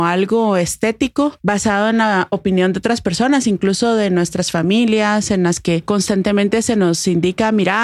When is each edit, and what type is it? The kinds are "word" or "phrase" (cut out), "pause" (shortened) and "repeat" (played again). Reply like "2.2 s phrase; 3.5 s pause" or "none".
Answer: none